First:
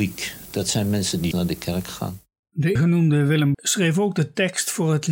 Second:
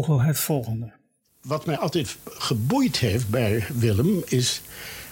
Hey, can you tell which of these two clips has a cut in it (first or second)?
first